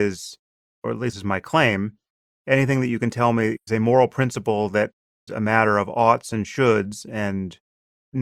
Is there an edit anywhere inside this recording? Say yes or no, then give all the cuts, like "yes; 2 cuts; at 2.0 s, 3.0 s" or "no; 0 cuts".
yes; 3 cuts; at 1.1 s, 3.7 s, 5.3 s